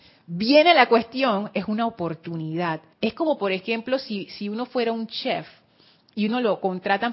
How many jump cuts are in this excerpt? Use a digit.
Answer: 1